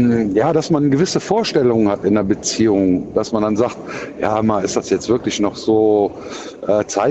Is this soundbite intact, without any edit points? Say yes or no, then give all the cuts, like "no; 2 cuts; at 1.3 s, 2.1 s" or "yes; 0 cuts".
yes; 0 cuts